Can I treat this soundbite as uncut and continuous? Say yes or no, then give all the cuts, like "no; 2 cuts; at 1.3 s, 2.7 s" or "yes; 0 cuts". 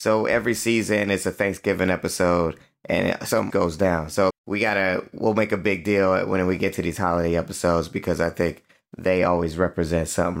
no; 2 cuts; at 3.5 s, 4.3 s